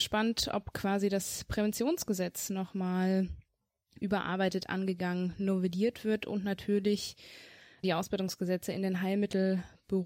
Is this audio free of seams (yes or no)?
yes